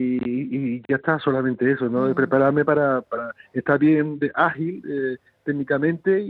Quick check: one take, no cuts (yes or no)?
yes